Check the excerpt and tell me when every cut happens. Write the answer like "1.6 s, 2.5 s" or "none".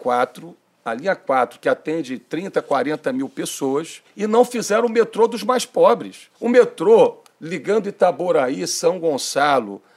4.0 s, 6.3 s